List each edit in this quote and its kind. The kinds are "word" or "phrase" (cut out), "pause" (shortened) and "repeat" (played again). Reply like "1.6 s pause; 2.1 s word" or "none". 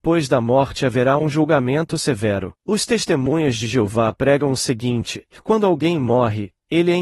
2.6 s pause